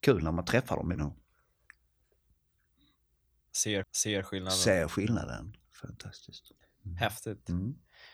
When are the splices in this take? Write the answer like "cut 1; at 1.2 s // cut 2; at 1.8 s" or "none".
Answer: cut 1; at 0.9 s // cut 2; at 3.8 s // cut 3; at 5.6 s